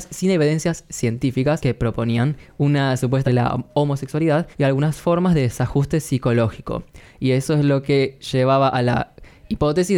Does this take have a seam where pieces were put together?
yes; 2 cuts; at 3.3 s, 4.5 s

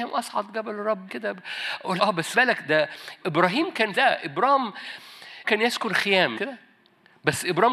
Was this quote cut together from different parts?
yes; 8 cuts; at 1.1 s, 2.0 s, 2.3 s, 2.7 s, 3.2 s, 3.9 s, 5.4 s, 6.4 s

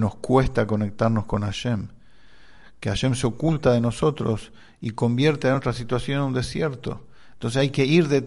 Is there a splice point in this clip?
no; 0 cuts

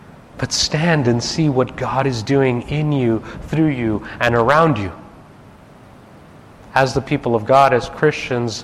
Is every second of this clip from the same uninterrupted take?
yes; 0 cuts

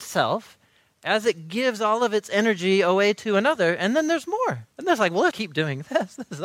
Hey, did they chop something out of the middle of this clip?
yes; 2 cuts; at 4.7 s, 5.3 s

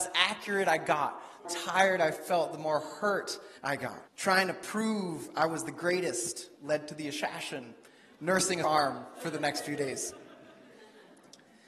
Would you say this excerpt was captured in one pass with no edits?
no; 4 cuts; at 1.4 s, 3.6 s, 4.1 s, 8.6 s

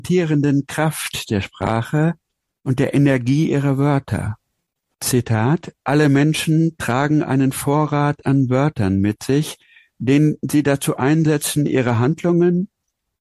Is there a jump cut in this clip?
no; 0 cuts

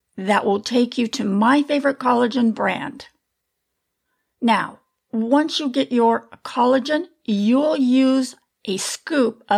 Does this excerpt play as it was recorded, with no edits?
yes; 0 cuts

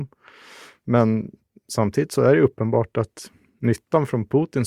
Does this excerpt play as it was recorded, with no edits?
yes; 0 cuts

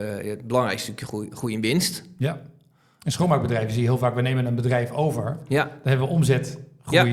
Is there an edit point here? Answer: no; 0 cuts

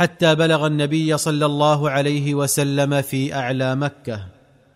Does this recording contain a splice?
no; 0 cuts

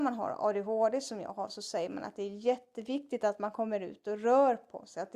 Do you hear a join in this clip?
no; 0 cuts

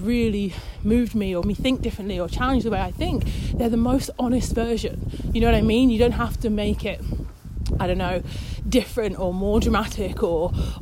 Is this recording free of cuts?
no; 1 cut; at 1.4 s

